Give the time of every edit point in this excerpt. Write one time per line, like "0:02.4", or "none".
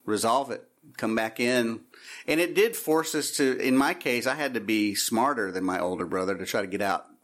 none